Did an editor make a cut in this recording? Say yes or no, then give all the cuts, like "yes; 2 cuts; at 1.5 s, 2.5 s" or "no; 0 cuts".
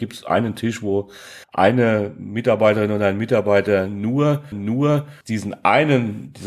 yes; 2 cuts; at 1.4 s, 4.5 s